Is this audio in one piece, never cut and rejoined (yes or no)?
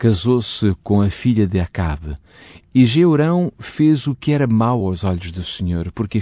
yes